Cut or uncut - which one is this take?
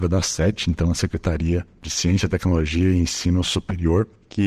uncut